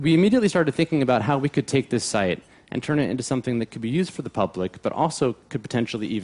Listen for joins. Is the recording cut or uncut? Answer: uncut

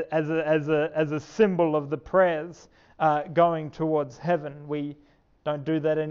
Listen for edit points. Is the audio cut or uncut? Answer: uncut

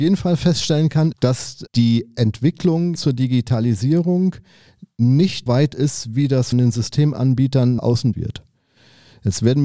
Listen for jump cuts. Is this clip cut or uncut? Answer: cut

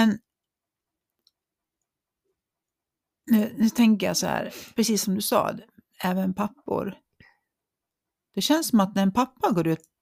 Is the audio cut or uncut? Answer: uncut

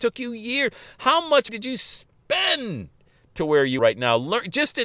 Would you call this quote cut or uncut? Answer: cut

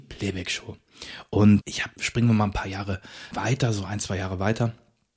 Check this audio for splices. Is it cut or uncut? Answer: cut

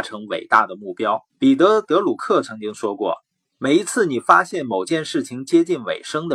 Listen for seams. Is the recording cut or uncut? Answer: cut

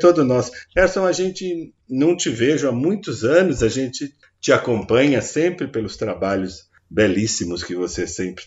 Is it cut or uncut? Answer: uncut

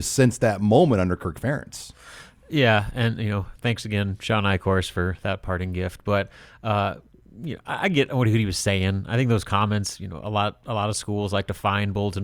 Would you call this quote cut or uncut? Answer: uncut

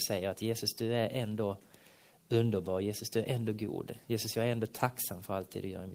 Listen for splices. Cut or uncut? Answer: uncut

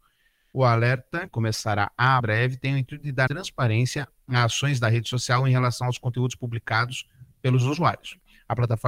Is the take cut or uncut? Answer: cut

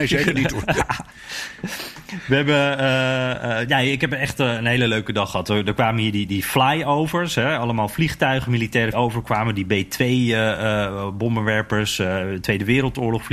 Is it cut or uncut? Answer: cut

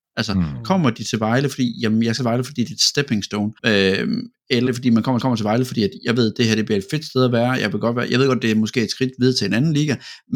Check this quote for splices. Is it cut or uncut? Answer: cut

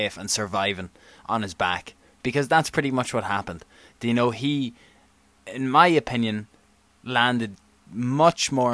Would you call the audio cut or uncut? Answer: uncut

